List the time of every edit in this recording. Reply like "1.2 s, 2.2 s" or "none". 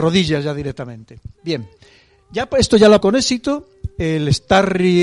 3.0 s

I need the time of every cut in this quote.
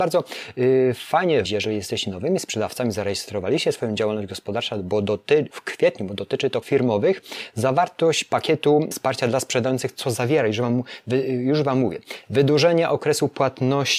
1.4 s, 5.5 s, 6.6 s, 8.9 s

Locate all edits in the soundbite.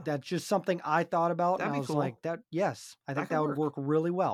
3.0 s

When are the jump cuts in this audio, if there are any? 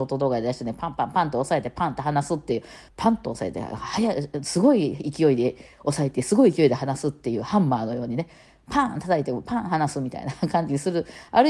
2.9 s

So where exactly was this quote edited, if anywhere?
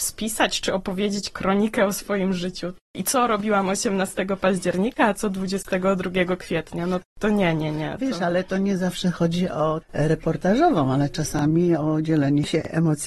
9.8 s

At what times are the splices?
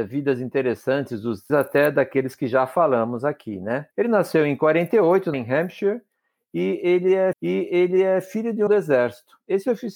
1.5 s, 3.9 s, 5.3 s, 7.3 s, 8.7 s

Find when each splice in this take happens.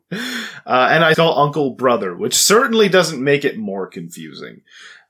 1.1 s

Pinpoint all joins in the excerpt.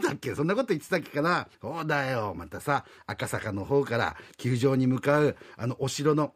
1.5 s

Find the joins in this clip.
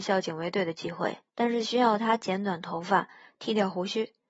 1.3 s

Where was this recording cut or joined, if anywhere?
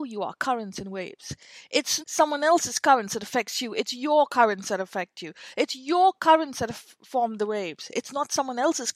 2.0 s

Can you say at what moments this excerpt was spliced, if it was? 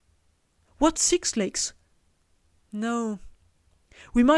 0.9 s, 2.4 s

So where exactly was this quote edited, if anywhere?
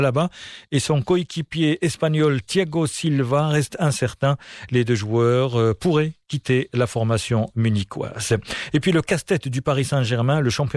none

